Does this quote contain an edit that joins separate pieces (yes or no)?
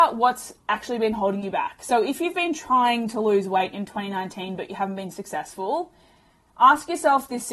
no